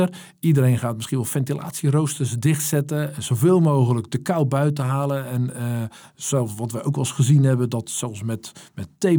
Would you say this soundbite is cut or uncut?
uncut